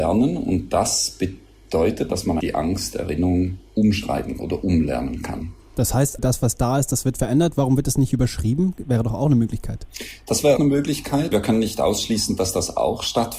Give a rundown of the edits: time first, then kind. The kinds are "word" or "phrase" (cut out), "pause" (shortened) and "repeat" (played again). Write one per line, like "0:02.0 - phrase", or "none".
0:02.1 - word
0:02.4 - word
0:04.4 - word
0:06.2 - word
0:10.6 - word
0:11.3 - word